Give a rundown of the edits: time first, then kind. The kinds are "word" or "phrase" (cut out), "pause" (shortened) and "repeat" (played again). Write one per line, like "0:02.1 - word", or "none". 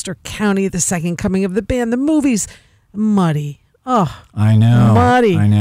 none